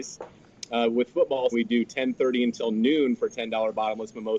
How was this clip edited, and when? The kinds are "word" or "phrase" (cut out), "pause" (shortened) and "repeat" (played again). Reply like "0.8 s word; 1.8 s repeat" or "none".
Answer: 1.5 s word